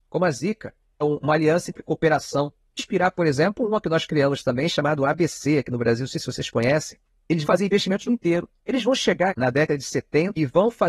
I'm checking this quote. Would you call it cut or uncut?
cut